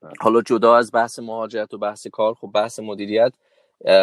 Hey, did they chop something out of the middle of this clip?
no; 0 cuts

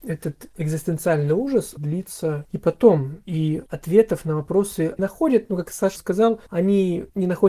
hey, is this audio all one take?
no; 3 cuts; at 1.8 s, 5.0 s, 6.0 s

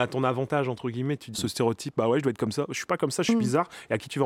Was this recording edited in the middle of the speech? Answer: yes; 1 cut; at 1.3 s

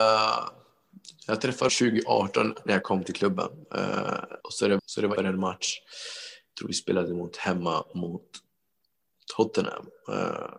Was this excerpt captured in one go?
no; 4 cuts; at 1.7 s, 4.4 s, 4.8 s, 5.2 s

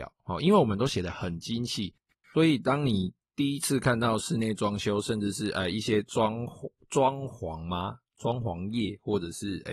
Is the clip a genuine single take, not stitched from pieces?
yes; 0 cuts

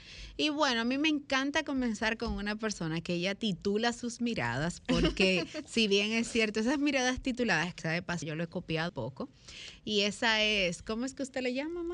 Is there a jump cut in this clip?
yes; 3 cuts; at 7.8 s, 8.2 s, 8.9 s

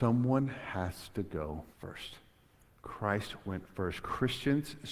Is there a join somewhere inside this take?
yes; 1 cut; at 1.7 s

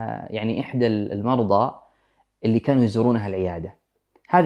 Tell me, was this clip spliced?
no; 0 cuts

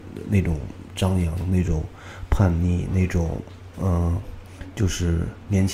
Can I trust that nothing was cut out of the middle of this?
yes; 0 cuts

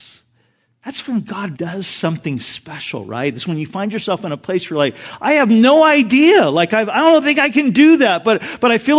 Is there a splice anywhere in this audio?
yes; 1 cut; at 1.6 s

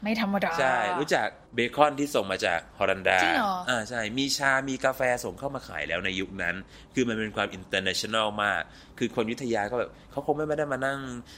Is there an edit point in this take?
yes; 1 cut; at 1.5 s

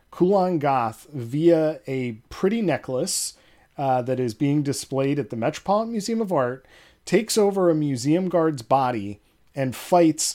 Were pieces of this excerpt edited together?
no; 0 cuts

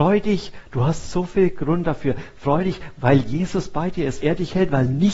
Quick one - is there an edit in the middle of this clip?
yes; 1 cut; at 4.2 s

